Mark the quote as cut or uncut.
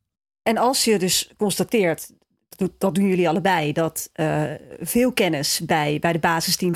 uncut